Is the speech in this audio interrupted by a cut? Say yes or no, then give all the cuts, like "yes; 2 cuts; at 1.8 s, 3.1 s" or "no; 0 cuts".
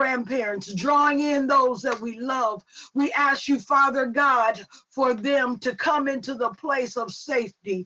no; 0 cuts